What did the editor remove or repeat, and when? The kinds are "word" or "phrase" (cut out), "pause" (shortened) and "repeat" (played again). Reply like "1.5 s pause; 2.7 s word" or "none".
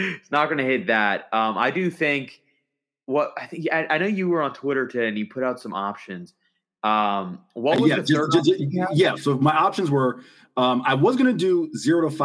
none